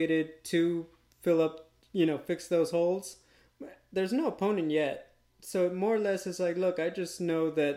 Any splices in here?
no; 0 cuts

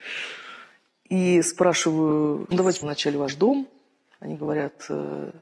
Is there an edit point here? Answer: yes; 2 cuts; at 2.5 s, 2.8 s

